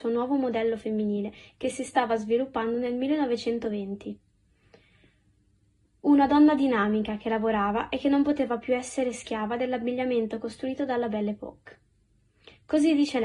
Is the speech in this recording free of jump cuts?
yes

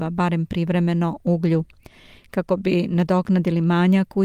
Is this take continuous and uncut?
yes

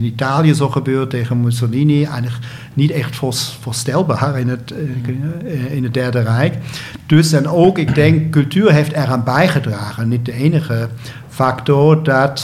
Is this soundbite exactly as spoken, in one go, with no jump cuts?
yes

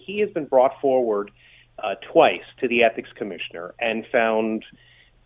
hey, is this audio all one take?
yes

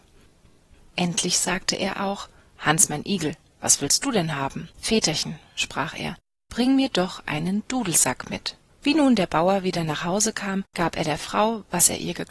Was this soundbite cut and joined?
yes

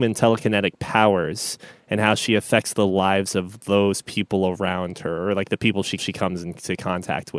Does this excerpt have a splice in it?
yes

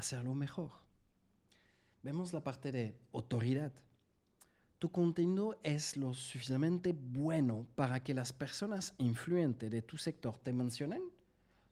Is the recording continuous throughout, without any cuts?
yes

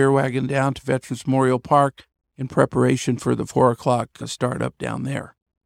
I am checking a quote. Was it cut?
no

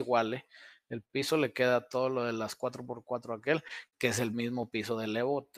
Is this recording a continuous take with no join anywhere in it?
yes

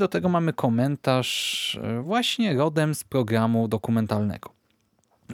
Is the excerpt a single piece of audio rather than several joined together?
yes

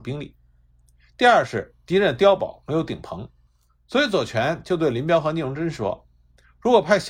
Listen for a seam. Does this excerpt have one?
no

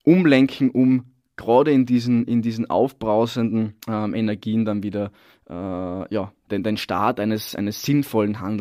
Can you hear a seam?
yes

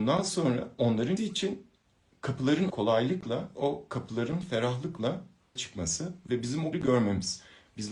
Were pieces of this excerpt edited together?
yes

